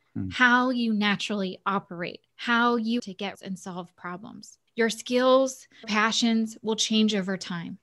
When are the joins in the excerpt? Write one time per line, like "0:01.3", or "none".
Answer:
0:02.3
0:03.0
0:03.3
0:04.7
0:05.8